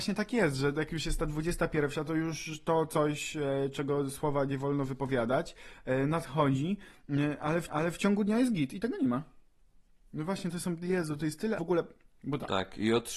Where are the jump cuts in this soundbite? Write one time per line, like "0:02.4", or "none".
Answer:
0:07.7
0:11.6

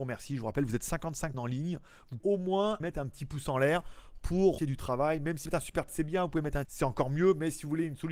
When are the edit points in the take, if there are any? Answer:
0:01.3
0:02.2
0:02.8
0:04.6
0:05.5
0:05.9
0:06.6

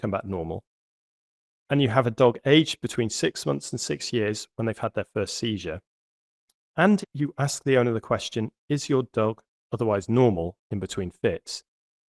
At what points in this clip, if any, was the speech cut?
0:07.0

